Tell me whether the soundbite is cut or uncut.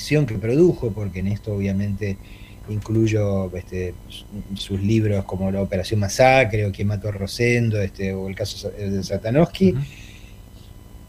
uncut